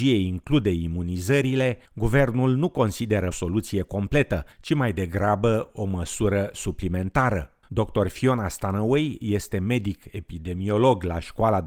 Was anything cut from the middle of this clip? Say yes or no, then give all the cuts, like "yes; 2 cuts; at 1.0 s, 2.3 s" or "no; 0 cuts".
yes; 4 cuts; at 1.9 s, 3.3 s, 4.5 s, 7.6 s